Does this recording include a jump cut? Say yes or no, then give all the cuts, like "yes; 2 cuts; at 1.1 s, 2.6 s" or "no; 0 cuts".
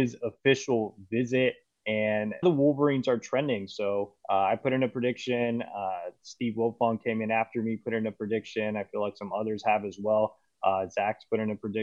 yes; 2 cuts; at 2.4 s, 4.2 s